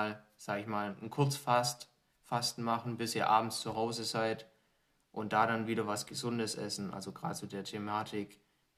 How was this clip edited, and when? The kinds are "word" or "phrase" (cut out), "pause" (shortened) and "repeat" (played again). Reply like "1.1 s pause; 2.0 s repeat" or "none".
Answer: none